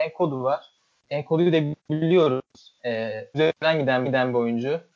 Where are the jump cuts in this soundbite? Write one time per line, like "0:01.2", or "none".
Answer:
0:01.8
0:03.3
0:04.0